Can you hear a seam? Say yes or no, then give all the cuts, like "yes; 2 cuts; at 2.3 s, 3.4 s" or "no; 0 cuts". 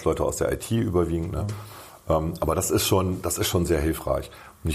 no; 0 cuts